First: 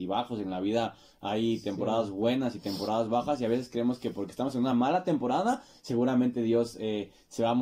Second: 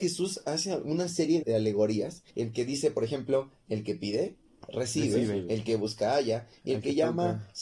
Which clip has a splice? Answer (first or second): second